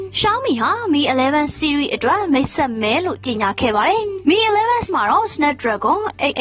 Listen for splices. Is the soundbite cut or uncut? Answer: cut